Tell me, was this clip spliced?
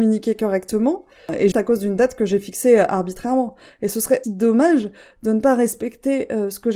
yes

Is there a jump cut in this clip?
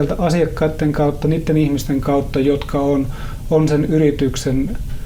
no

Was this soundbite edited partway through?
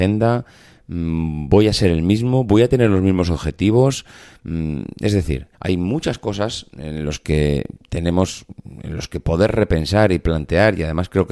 yes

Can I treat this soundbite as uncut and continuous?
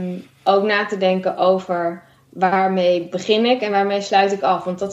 yes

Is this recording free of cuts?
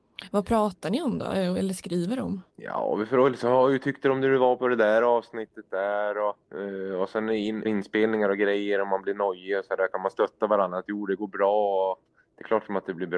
no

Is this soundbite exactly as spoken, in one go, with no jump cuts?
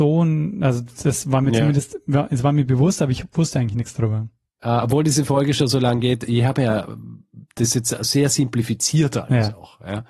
yes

